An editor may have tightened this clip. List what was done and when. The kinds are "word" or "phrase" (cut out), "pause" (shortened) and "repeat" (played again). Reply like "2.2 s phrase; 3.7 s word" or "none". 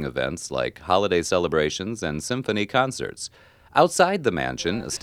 none